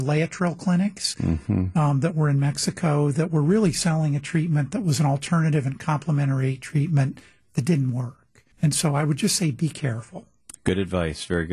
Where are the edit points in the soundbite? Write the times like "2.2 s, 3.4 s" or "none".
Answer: 8.5 s